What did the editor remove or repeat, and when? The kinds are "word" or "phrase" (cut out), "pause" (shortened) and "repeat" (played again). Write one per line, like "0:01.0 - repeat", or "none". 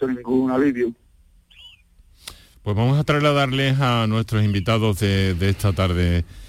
none

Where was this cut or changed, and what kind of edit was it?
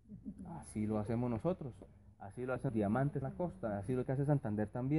0:02.7 - word
0:03.2 - word
0:04.0 - word

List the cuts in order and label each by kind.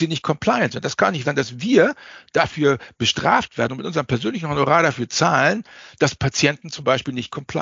0:01.2 - word

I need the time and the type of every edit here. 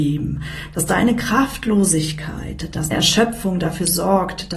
0:02.9 - word

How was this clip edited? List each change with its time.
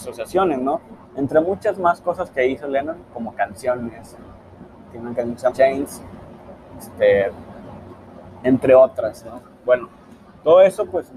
0:01.0 - pause
0:05.5 - phrase

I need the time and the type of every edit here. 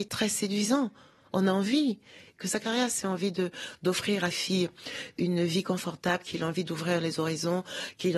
0:04.3 - phrase

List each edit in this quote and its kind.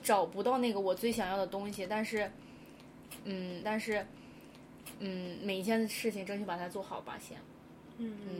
0:03.6 - repeat

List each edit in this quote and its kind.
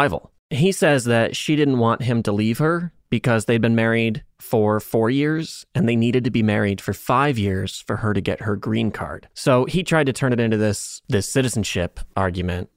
0:04.3 - pause
0:09.3 - pause

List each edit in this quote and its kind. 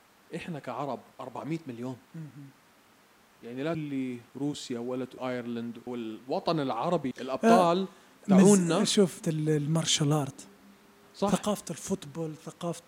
0:01.1 - pause
0:02.0 - pause
0:03.7 - word
0:04.3 - pause
0:05.2 - word
0:05.9 - word
0:07.1 - phrase
0:09.2 - phrase

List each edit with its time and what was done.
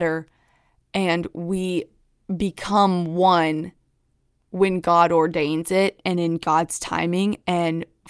none

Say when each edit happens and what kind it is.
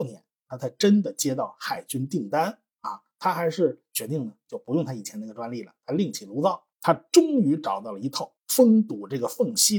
0:06.7 - pause
0:08.4 - pause

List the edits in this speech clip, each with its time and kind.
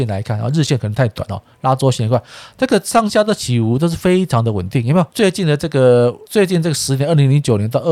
0:05.1 - pause
0:06.2 - pause

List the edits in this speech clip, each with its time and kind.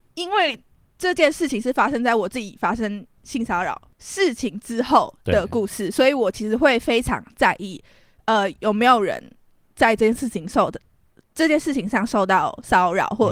none

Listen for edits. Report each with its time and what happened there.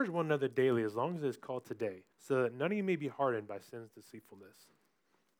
0:02.1 - pause

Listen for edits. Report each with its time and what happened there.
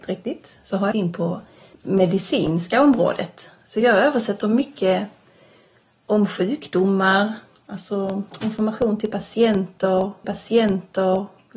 0:00.9 - phrase
0:01.7 - pause
0:10.2 - repeat

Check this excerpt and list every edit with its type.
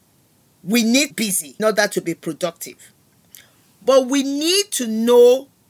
0:01.1 - phrase
0:01.6 - word

